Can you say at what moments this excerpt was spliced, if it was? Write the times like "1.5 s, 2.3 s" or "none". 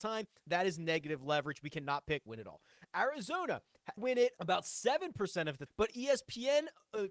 2.3 s, 4.0 s, 4.4 s, 5.7 s

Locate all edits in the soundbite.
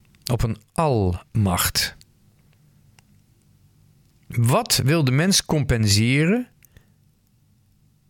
none

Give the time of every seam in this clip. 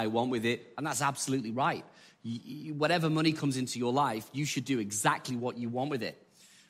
none

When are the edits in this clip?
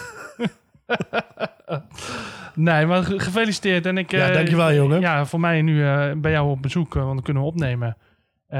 none

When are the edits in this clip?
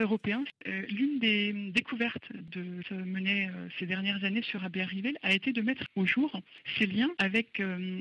2.8 s

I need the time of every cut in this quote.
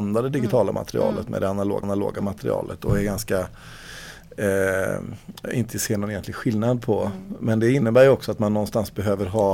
1.8 s

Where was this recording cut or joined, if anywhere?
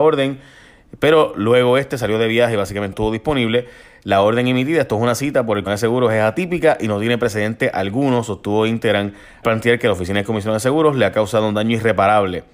2.9 s, 5.7 s, 9.4 s

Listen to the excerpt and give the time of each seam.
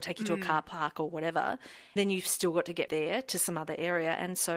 2.0 s, 2.9 s

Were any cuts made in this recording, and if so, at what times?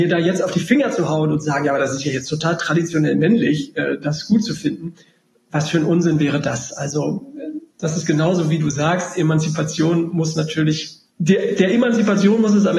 11.1 s

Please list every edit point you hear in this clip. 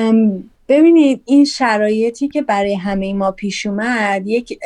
none

